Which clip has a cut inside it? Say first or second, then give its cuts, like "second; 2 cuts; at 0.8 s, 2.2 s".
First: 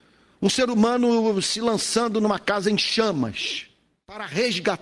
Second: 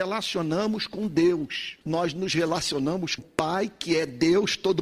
second; 2 cuts; at 1.8 s, 3.2 s